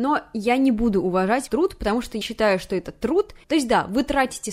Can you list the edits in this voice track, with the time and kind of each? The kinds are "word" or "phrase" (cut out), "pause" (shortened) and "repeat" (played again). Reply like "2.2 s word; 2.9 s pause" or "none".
1.5 s word; 2.2 s word